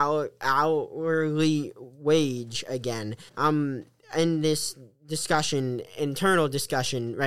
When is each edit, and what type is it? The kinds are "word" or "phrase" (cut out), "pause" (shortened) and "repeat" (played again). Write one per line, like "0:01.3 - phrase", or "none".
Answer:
0:03.3 - pause